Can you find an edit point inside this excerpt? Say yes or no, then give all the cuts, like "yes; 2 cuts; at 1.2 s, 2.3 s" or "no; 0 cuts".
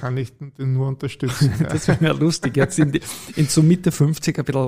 no; 0 cuts